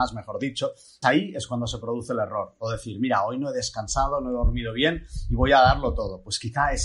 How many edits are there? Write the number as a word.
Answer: one